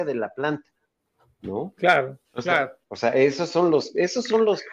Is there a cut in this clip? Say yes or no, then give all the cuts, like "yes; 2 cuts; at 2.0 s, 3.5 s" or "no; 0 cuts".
yes; 1 cut; at 2.2 s